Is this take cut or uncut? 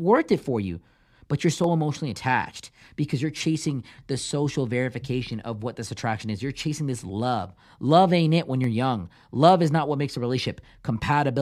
uncut